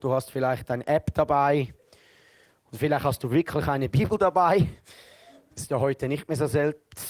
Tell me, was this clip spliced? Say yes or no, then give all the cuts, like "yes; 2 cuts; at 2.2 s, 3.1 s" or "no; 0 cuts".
no; 0 cuts